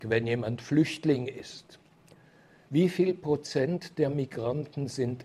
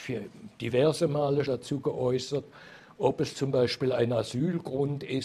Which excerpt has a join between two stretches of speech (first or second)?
second